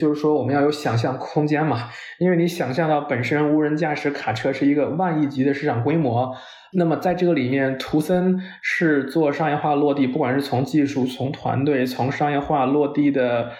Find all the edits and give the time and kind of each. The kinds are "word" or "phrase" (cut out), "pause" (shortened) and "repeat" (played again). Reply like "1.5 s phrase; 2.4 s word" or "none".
none